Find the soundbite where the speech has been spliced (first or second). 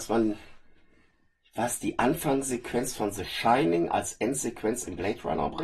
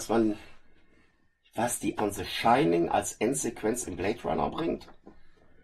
second